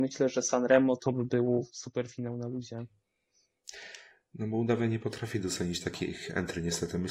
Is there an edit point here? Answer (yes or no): no